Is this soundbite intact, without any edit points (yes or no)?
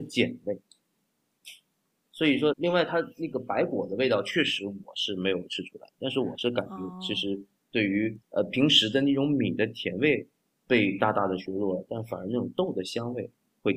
no